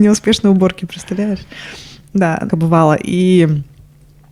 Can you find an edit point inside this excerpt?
yes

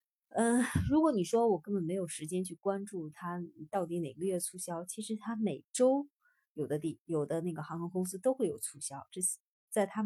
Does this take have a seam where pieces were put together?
no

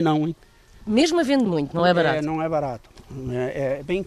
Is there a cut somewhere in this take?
no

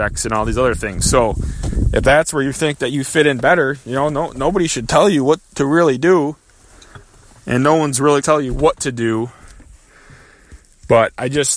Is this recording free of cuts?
no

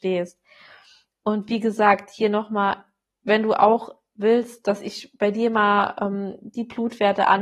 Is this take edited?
no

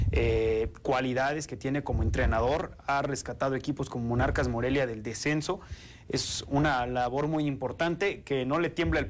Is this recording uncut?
yes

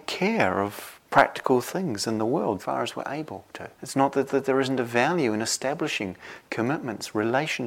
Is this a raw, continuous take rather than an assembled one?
no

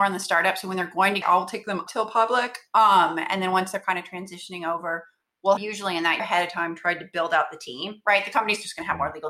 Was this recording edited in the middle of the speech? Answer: yes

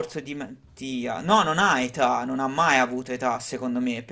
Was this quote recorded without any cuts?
yes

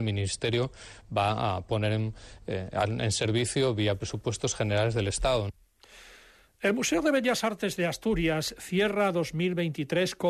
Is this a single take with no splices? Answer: yes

